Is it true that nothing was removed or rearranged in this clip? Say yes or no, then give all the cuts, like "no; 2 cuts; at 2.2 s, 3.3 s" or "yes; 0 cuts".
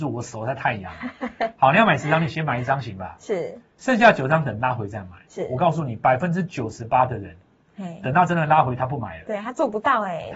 yes; 0 cuts